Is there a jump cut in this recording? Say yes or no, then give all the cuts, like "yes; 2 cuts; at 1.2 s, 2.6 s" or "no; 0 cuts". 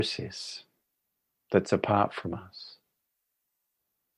no; 0 cuts